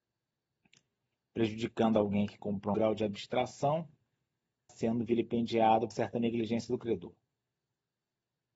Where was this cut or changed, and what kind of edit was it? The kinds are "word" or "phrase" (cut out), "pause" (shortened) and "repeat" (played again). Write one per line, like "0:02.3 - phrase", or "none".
0:02.7 - phrase
0:04.7 - phrase
0:05.9 - word